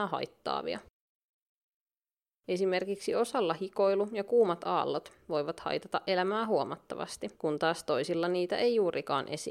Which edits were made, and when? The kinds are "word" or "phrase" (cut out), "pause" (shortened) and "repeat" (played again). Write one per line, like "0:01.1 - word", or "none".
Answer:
0:07.4 - pause